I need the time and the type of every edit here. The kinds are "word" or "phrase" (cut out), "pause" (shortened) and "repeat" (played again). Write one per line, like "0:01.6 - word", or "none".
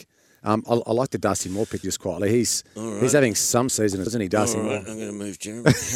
0:01.8 - word
0:03.7 - word
0:04.1 - word